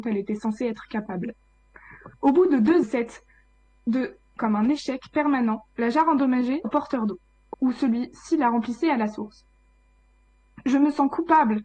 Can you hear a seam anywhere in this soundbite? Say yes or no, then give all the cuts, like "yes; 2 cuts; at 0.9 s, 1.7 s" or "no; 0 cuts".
yes; 5 cuts; at 2.1 s, 2.8 s, 4.4 s, 6.6 s, 7.5 s